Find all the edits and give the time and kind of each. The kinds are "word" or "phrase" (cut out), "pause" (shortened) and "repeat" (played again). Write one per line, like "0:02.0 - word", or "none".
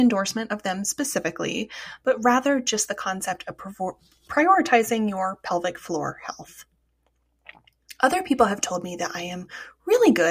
none